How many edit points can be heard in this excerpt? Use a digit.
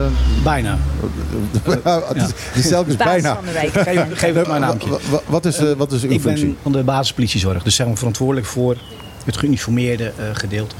2